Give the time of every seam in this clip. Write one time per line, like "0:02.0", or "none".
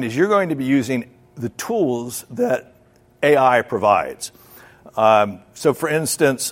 none